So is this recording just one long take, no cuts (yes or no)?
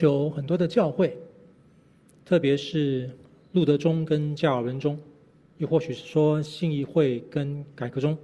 yes